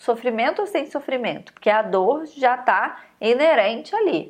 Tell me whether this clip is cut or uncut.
uncut